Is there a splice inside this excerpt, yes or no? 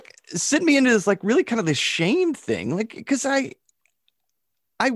no